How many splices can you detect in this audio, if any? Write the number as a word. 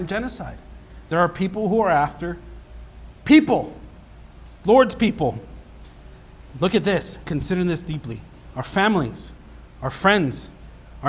one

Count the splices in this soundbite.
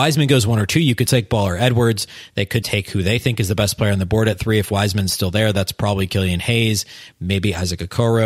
two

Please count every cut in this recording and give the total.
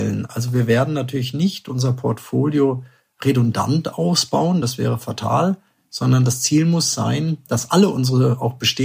zero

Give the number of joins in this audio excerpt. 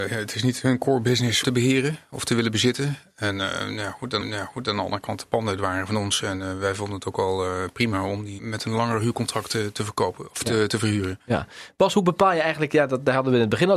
three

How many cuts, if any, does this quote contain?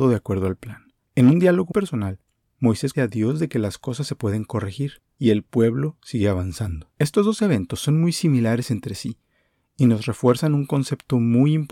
five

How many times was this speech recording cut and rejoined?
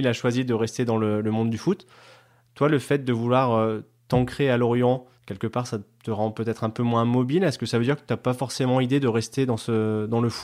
one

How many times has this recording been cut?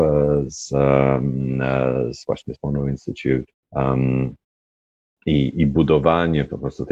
one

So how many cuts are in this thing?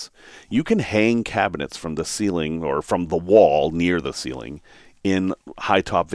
zero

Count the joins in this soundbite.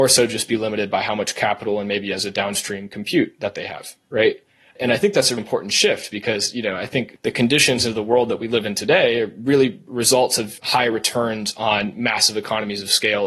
one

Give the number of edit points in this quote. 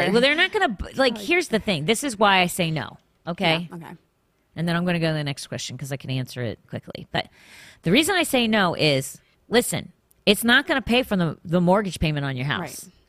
two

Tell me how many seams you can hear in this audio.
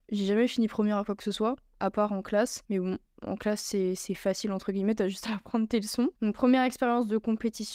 two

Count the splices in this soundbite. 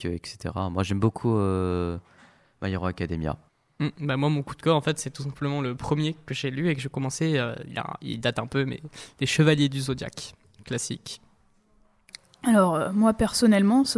one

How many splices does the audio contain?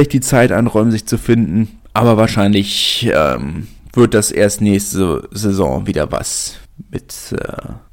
zero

